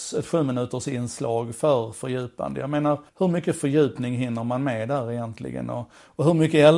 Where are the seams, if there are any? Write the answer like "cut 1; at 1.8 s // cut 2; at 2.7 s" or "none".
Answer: cut 1; at 3.1 s